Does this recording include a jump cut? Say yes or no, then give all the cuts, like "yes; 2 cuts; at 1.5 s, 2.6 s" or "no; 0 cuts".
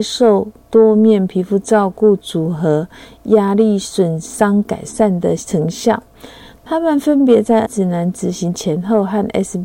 yes; 1 cut; at 7.6 s